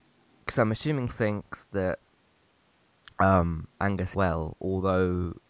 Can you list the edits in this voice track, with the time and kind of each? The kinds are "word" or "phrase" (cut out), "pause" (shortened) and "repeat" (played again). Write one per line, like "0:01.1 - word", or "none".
0:01.1 - phrase
0:04.1 - phrase